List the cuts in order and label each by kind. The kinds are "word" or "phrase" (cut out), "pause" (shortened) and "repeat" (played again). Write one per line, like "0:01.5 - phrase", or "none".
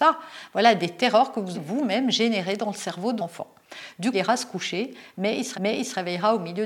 0:01.5 - word
0:03.2 - word
0:04.1 - phrase
0:05.5 - repeat

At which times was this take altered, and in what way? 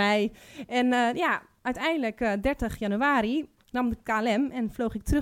0:03.6 - pause

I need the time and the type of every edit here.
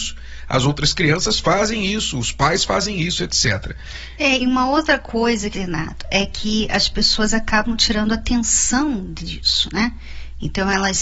0:05.5 - word

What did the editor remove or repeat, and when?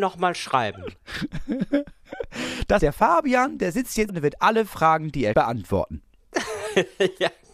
0:02.8 - word
0:04.1 - word
0:05.3 - word

